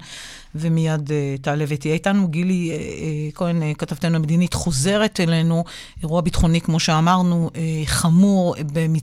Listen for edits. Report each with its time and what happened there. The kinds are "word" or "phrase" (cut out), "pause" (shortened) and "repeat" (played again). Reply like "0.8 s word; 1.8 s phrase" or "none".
none